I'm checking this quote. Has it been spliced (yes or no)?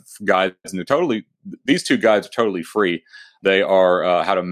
yes